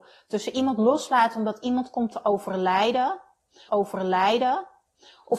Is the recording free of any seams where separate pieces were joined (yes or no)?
no